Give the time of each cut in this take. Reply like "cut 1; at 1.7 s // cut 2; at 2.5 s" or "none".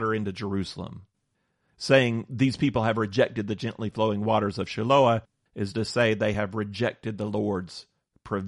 none